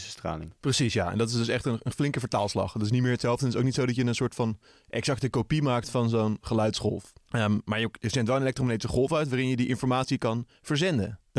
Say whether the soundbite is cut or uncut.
uncut